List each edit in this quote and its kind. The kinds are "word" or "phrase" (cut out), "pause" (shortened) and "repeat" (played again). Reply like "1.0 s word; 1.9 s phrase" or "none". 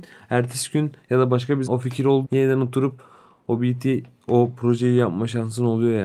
1.7 s word; 2.2 s word